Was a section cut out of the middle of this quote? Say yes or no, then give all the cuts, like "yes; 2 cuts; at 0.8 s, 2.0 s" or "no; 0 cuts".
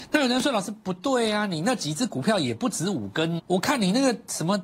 yes; 1 cut; at 3.4 s